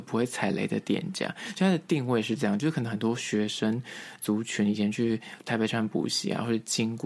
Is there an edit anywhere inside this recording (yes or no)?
yes